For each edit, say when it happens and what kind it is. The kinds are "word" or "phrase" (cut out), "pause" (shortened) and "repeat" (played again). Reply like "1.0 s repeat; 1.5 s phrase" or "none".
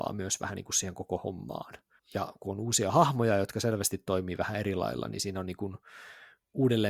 2.0 s pause